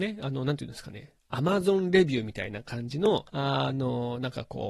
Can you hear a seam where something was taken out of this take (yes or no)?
yes